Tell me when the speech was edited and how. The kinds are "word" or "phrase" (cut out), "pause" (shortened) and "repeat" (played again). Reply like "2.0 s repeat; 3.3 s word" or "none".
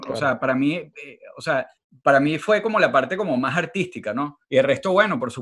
1.8 s pause; 4.4 s pause